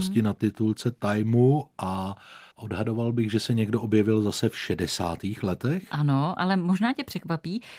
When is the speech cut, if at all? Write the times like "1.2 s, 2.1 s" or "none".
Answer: 2.5 s